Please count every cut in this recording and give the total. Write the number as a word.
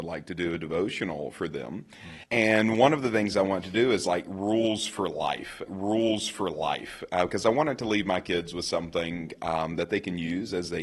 two